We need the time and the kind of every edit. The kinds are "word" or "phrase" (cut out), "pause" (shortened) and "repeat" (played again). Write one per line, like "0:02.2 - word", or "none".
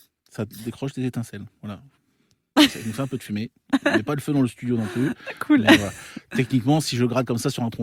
0:01.6 - pause